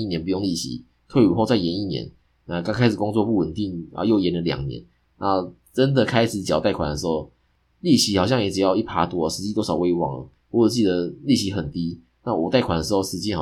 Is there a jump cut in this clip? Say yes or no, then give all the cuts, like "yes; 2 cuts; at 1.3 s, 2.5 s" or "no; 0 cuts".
no; 0 cuts